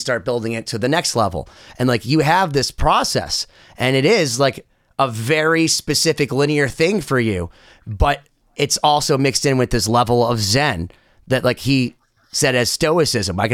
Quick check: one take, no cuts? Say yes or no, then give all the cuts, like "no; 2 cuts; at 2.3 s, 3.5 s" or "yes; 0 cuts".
yes; 0 cuts